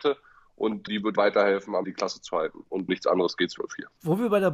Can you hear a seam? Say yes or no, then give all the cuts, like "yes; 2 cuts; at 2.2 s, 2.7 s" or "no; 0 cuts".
yes; 4 cuts; at 1.2 s, 1.8 s, 2.9 s, 3.6 s